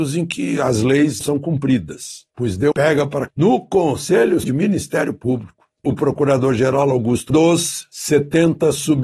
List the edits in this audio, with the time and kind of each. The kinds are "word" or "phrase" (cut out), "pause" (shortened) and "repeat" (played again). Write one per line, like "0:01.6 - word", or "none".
0:01.2 - word
0:02.3 - pause
0:02.7 - word
0:03.3 - word
0:04.4 - word
0:05.8 - word
0:07.3 - phrase